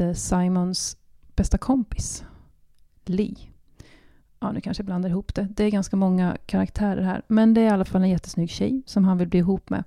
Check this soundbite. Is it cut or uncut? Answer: uncut